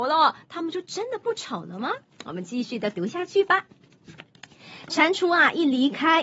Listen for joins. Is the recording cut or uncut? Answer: uncut